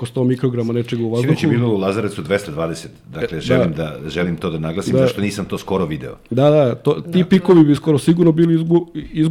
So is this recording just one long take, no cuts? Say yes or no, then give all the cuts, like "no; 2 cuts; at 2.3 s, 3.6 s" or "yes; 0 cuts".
yes; 0 cuts